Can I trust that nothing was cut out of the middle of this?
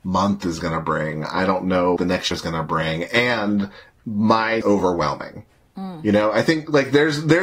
no; 3 cuts; at 2.0 s, 2.3 s, 4.6 s

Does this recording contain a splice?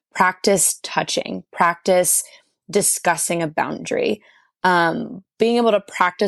no; 0 cuts

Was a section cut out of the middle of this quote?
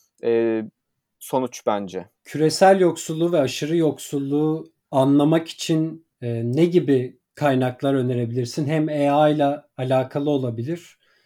yes; 3 cuts; at 2.2 s, 6.1 s, 7.2 s

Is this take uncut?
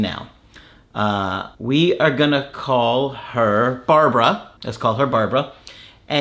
no; 2 cuts; at 1.5 s, 4.6 s

